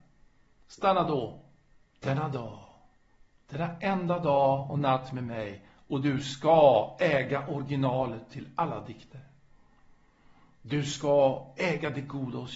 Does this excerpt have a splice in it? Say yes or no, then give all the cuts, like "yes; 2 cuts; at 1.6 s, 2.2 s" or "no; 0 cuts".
no; 0 cuts